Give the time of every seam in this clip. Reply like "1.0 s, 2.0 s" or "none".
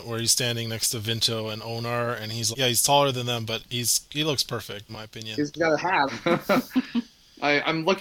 2.5 s, 4.9 s, 6.1 s